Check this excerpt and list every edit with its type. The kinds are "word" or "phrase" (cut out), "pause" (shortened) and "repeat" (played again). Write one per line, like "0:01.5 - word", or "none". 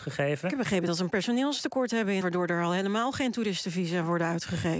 0:02.2 - word

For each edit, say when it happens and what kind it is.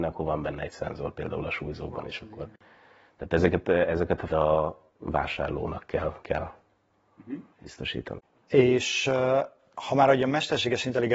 0:04.3 - phrase
0:04.9 - pause
0:06.2 - phrase
0:07.5 - pause

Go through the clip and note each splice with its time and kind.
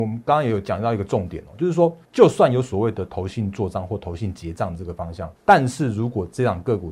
0:02.0 - pause
0:05.4 - pause

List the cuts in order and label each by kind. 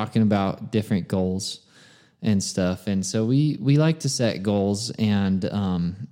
none

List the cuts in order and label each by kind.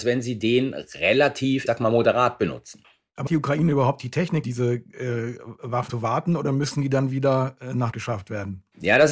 0:01.7 - word
0:03.3 - word
0:04.4 - word
0:05.9 - word
0:07.9 - word

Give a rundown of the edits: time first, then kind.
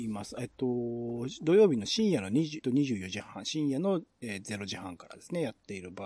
0:02.6 - phrase

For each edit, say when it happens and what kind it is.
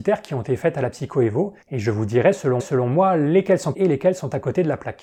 0:01.6 - pause
0:02.6 - repeat
0:03.7 - word

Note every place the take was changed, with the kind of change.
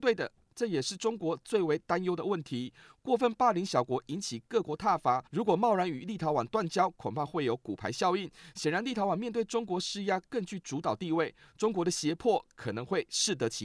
0:05.3 - pause

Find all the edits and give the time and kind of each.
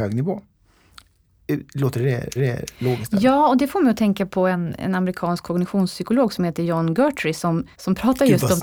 0:02.4 - repeat
0:07.7 - pause

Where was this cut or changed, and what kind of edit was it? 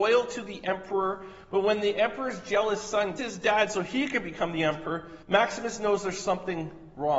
0:03.2 - word
0:05.2 - pause

